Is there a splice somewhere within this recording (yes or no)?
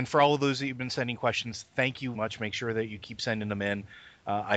yes